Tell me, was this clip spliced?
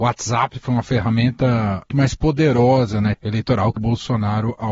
yes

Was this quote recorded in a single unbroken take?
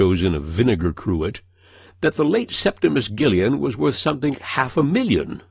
no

